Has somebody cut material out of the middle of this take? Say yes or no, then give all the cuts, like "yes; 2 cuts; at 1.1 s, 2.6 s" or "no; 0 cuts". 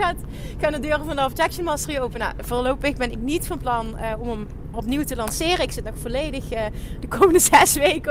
yes; 1 cut; at 4.7 s